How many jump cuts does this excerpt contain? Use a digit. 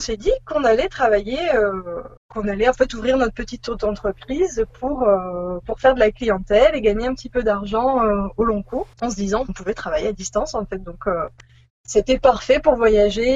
3